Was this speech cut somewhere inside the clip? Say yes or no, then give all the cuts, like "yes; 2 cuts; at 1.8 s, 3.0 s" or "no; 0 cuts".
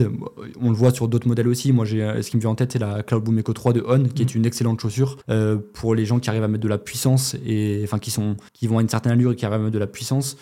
yes; 2 cuts; at 5.2 s, 8.5 s